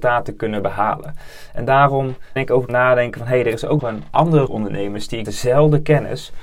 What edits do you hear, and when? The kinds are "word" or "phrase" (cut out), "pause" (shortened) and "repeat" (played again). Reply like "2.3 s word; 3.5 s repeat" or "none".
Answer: 2.4 s word; 2.7 s word; 3.8 s word; 4.5 s word; 5.2 s word